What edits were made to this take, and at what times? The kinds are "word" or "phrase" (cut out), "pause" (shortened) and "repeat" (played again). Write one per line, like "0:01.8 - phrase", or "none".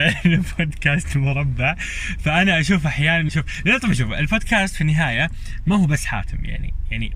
0:03.3 - word